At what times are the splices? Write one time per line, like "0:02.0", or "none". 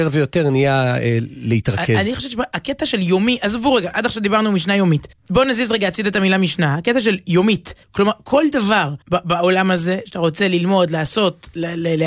0:05.1
0:07.8
0:09.0